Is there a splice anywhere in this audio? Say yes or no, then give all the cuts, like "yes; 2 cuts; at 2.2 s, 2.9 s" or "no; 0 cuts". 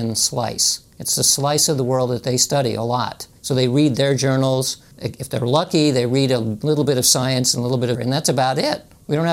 yes; 4 cuts; at 0.9 s, 3.4 s, 4.9 s, 7.9 s